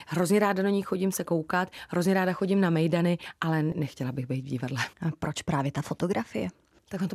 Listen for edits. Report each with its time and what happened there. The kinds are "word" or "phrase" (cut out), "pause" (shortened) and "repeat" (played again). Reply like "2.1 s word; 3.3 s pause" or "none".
4.9 s pause

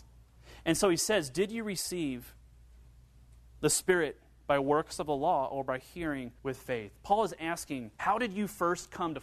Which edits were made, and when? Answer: 6.4 s pause; 8.0 s pause

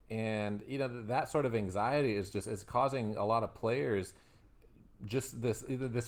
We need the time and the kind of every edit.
none

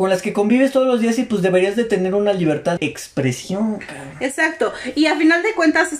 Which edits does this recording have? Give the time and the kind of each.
2.8 s word

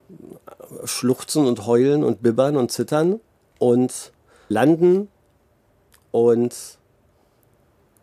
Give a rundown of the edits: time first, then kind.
4.5 s word

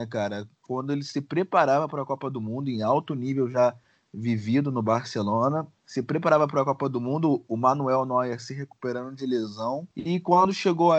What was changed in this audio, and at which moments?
5.8 s pause; 9.9 s pause

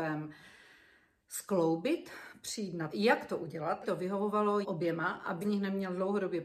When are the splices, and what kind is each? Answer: 2.9 s word; 3.8 s word; 4.6 s word; 5.4 s word

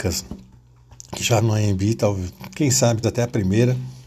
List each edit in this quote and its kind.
1.4 s word; 3.0 s word

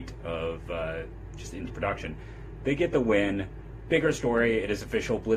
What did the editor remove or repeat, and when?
1.7 s phrase

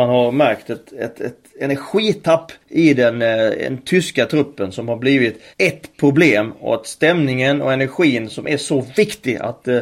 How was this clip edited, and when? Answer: 2.6 s pause; 5.5 s pause

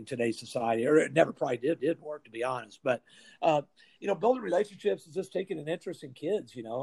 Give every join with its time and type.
1.8 s repeat

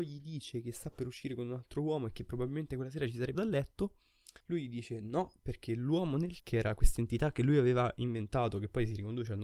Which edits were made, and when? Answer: 3.3 s word; 4.4 s pause; 6.4 s word

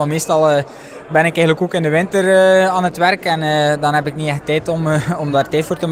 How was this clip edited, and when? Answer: none

